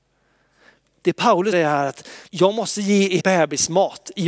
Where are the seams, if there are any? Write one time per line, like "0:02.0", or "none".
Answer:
0:01.5
0:02.3
0:03.2

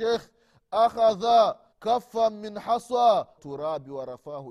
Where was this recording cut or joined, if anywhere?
0:01.7
0:03.4

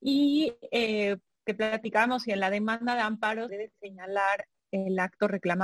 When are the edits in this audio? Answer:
0:03.5

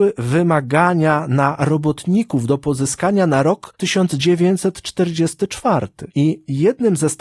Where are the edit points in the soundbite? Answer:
none

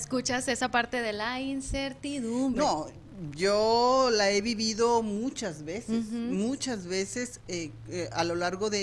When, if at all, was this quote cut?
none

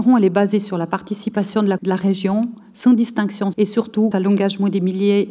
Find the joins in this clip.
0:01.8
0:03.5
0:04.1

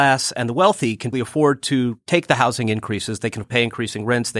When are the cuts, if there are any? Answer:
0:01.1
0:03.4

